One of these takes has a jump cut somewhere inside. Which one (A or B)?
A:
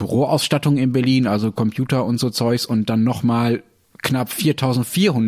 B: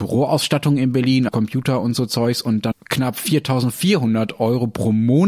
B